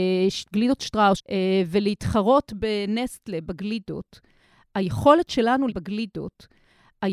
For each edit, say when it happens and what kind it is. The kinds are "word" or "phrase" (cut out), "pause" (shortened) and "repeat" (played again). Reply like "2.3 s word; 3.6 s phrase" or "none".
1.2 s phrase; 5.7 s repeat